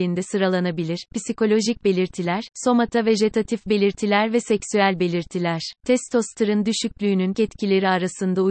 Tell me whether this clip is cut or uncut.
cut